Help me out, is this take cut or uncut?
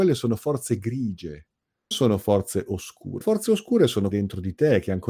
cut